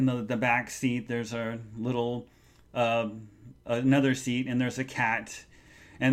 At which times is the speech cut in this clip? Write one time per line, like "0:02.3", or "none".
none